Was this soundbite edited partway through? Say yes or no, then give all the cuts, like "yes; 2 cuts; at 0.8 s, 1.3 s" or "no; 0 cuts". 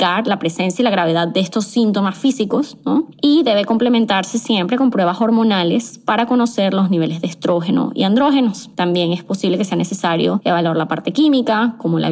no; 0 cuts